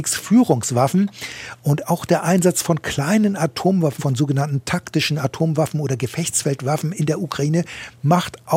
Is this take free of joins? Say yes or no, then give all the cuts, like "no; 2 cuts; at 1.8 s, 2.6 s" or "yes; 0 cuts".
no; 1 cut; at 4.0 s